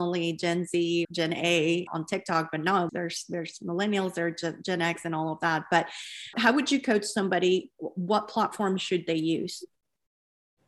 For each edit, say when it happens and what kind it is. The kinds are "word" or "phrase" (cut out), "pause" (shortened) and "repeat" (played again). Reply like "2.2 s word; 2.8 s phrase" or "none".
1.0 s word; 1.9 s word; 2.9 s word; 6.3 s word